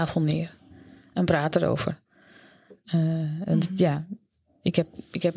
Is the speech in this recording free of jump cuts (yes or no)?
yes